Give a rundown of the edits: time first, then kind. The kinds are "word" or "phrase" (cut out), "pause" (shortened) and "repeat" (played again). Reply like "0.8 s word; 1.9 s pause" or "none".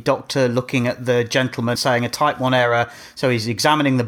1.8 s word